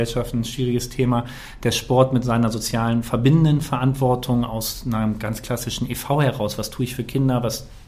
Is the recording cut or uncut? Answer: uncut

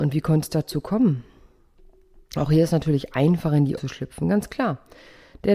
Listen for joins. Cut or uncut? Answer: cut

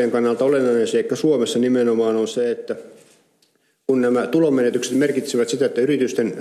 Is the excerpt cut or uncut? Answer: uncut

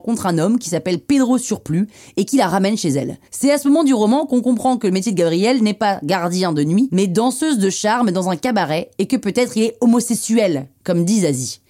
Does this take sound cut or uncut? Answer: uncut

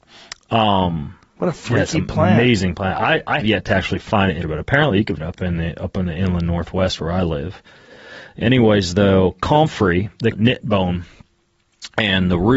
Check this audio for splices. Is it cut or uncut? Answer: cut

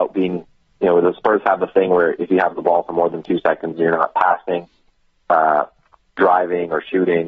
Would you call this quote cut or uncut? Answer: uncut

